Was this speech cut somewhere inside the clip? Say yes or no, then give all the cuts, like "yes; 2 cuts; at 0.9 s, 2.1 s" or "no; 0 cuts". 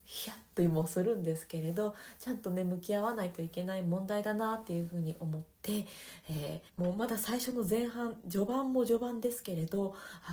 yes; 2 cuts; at 5.5 s, 6.7 s